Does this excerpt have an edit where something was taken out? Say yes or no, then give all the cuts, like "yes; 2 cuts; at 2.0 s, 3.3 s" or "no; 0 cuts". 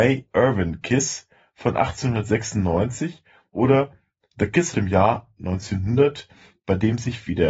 yes; 1 cut; at 4.7 s